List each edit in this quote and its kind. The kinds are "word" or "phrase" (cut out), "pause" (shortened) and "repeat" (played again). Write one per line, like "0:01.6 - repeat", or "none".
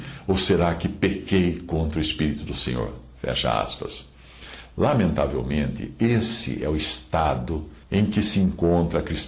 0:07.8 - pause